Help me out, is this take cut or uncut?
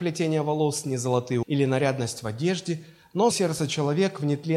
cut